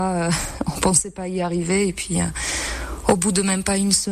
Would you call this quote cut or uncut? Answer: uncut